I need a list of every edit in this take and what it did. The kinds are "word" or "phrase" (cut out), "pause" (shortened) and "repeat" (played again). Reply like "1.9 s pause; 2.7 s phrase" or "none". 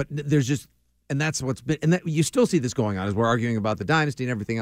none